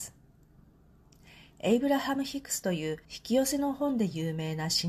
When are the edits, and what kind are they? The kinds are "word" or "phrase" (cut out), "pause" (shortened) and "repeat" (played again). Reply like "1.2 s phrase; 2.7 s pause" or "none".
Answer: 3.0 s pause